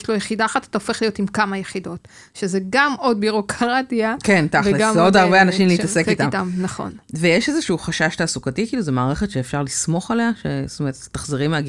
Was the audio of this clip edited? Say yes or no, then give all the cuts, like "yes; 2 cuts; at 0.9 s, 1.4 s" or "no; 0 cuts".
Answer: no; 0 cuts